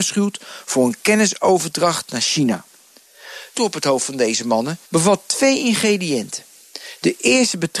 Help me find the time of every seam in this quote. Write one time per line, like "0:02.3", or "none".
0:03.6
0:04.8